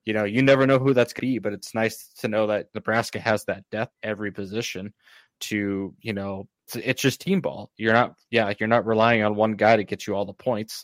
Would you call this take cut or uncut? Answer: cut